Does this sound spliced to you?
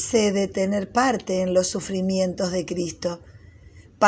no; 0 cuts

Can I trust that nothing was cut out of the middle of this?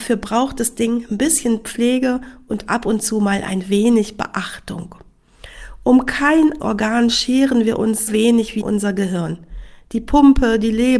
no; 3 cuts; at 6.6 s, 8.1 s, 8.6 s

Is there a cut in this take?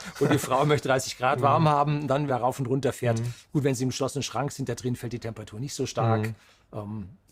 yes; 1 cut; at 2.3 s

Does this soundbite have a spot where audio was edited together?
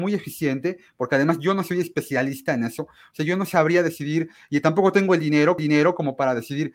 yes; 1 cut; at 5.6 s

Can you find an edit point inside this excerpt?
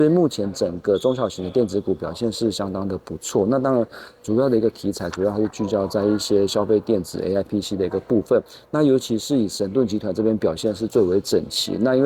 no; 0 cuts

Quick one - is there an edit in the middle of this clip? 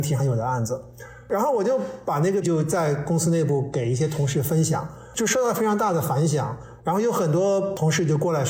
yes; 1 cut; at 2.4 s

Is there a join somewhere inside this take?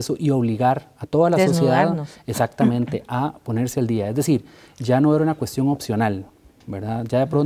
no; 0 cuts

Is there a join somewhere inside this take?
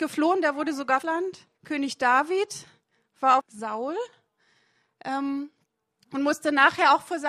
yes; 3 cuts; at 1.0 s, 1.5 s, 3.4 s

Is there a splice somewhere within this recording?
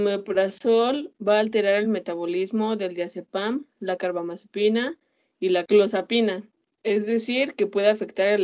no; 0 cuts

